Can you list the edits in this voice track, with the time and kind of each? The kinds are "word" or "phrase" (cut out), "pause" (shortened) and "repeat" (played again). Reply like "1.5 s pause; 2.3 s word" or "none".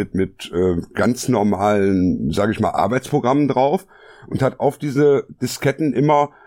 none